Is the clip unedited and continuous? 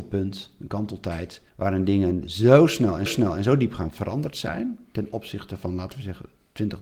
no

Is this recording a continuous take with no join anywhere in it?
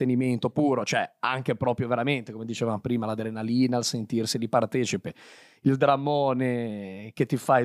yes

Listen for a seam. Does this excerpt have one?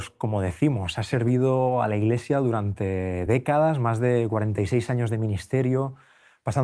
no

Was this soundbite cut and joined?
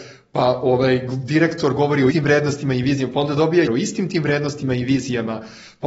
yes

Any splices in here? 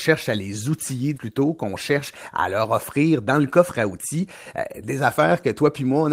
yes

